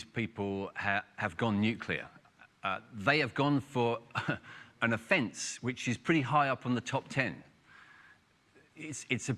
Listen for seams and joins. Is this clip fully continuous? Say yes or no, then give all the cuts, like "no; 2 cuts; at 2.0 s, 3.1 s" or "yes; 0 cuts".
yes; 0 cuts